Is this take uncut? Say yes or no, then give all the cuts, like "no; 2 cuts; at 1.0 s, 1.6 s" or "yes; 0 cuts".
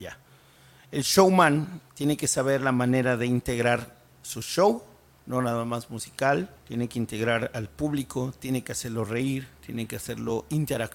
no; 2 cuts; at 1.9 s, 6.6 s